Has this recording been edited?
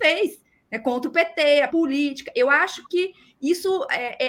yes; 1 cut; at 1.7 s

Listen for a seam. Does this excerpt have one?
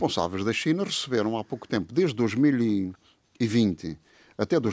no; 0 cuts

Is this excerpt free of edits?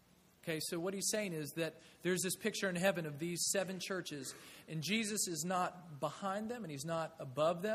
yes; 0 cuts

